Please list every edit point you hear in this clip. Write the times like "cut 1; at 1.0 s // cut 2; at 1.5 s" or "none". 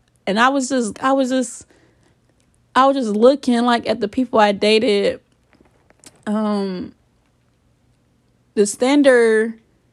cut 1; at 0.9 s